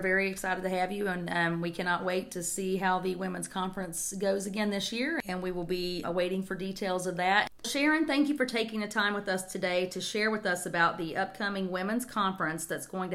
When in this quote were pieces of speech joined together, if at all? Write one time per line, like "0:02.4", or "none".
0:06.0